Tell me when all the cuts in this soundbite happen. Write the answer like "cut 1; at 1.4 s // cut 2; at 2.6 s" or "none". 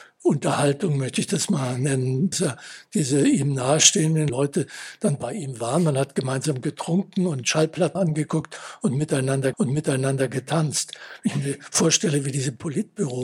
cut 1; at 2.3 s // cut 2; at 4.3 s // cut 3; at 8.0 s // cut 4; at 9.5 s